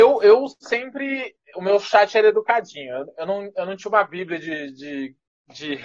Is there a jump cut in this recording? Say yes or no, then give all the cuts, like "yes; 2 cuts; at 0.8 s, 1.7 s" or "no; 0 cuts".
yes; 1 cut; at 1.5 s